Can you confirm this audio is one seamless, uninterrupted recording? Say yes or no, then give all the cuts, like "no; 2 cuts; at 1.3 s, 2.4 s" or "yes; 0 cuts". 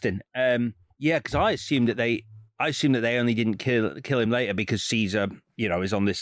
yes; 0 cuts